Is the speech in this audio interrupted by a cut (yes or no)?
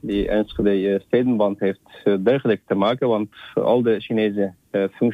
no